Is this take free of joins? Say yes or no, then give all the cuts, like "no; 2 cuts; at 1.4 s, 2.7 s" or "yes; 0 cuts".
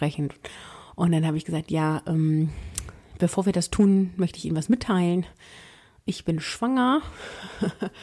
yes; 0 cuts